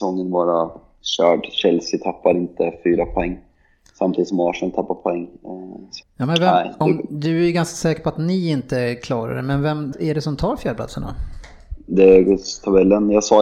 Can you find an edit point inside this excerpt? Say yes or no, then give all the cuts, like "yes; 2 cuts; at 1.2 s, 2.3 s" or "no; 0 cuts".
yes; 2 cuts; at 6.0 s, 9.9 s